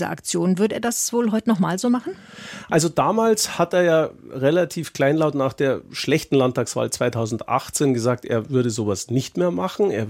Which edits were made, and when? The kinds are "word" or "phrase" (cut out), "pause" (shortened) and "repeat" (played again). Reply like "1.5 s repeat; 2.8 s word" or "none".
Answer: none